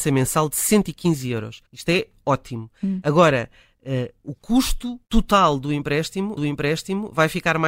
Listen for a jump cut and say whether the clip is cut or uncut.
cut